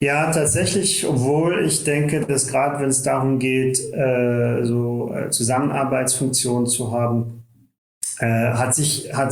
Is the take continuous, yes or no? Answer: yes